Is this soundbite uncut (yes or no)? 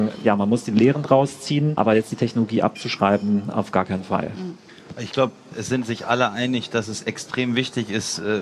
yes